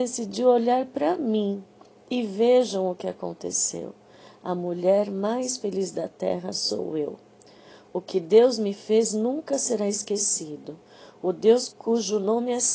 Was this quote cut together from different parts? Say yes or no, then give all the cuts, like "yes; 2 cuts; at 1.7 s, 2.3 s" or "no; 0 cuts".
yes; 1 cut; at 11.7 s